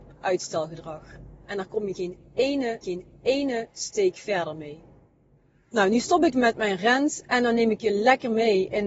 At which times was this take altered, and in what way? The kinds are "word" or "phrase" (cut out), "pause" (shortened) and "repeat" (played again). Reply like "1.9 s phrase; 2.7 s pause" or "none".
2.8 s repeat; 5.3 s pause; 6.3 s word